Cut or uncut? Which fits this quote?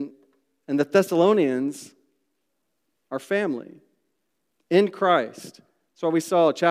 uncut